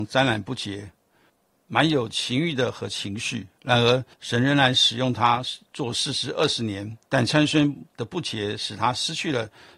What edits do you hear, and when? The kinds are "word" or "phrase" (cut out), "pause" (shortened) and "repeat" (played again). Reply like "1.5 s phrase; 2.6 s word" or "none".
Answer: 1.3 s pause; 4.1 s pause; 7.0 s pause; 7.9 s pause